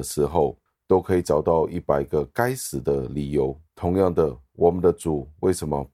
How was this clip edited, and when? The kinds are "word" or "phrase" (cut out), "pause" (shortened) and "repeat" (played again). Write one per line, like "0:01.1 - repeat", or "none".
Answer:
0:03.7 - pause